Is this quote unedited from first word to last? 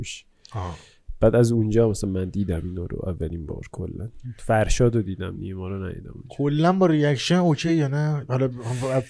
yes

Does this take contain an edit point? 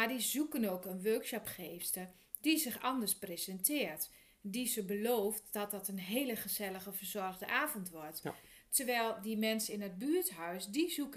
no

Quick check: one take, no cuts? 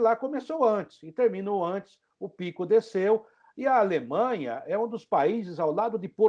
yes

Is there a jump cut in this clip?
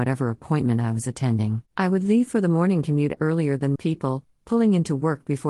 yes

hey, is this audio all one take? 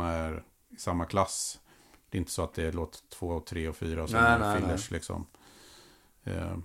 yes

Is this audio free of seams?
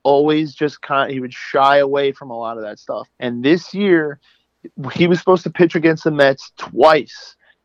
no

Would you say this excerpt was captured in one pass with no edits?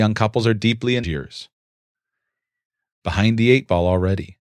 no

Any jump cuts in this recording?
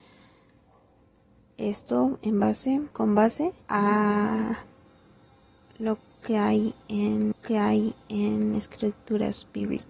yes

